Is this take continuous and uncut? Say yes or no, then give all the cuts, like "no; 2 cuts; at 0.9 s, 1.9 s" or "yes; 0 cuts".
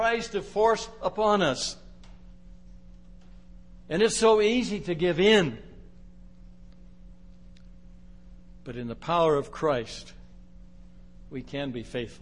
yes; 0 cuts